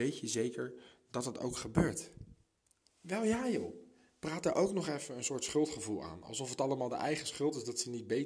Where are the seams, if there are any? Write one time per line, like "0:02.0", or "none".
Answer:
none